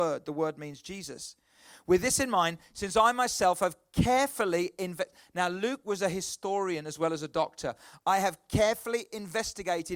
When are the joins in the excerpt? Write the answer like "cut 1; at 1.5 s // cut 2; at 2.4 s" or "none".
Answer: none